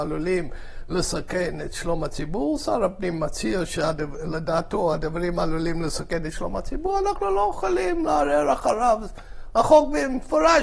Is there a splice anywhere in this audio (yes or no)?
no